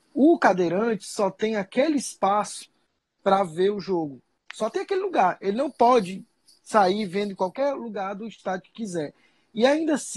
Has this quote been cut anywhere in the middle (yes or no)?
no